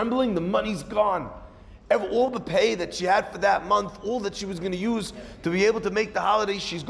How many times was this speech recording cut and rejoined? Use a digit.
0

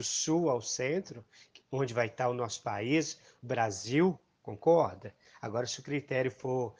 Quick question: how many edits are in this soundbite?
0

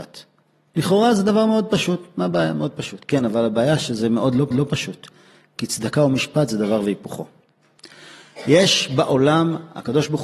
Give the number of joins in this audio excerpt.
1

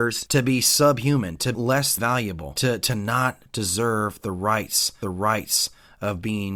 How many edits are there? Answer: 3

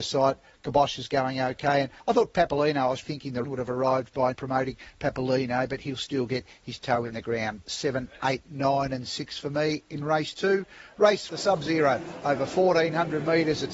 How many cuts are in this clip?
5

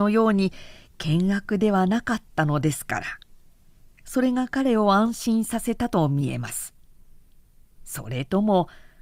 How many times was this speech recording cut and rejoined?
0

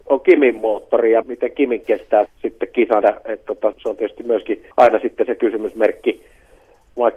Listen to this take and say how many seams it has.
6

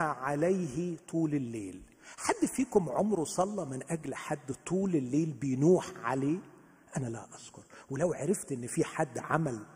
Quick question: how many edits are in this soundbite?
0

